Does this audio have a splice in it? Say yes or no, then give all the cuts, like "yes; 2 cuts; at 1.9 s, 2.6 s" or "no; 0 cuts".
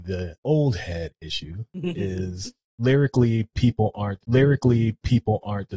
yes; 1 cut; at 4.2 s